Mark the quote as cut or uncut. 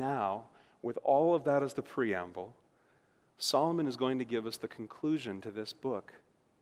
uncut